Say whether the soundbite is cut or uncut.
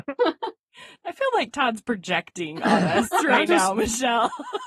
uncut